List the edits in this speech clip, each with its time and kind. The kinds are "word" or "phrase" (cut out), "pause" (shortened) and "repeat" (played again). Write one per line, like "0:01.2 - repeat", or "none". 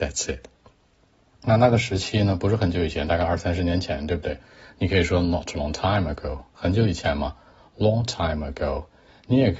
none